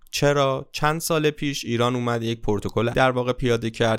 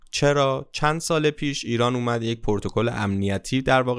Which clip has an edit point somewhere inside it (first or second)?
first